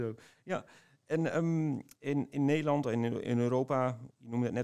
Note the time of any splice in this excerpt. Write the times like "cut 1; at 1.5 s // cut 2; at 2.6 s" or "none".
cut 1; at 1.9 s